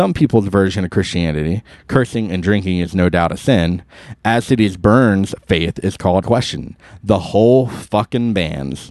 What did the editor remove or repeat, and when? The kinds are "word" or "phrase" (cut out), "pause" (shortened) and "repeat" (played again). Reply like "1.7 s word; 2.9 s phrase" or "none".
6.2 s word